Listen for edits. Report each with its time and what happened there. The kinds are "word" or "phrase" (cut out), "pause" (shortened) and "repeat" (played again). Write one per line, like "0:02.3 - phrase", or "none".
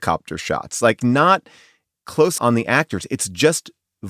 0:01.0 - word
0:02.4 - word